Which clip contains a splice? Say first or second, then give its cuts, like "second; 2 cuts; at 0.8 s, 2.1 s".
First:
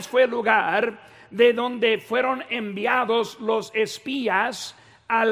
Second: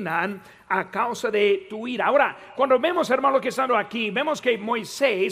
second; 1 cut; at 3.7 s